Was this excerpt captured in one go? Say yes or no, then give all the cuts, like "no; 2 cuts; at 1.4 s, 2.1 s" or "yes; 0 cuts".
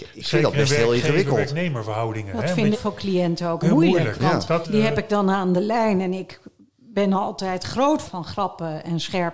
no; 4 cuts; at 2.7 s, 3.6 s, 4.6 s, 8.0 s